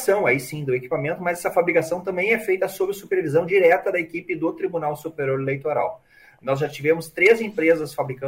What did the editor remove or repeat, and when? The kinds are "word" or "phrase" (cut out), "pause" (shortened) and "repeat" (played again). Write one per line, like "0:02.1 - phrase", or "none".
none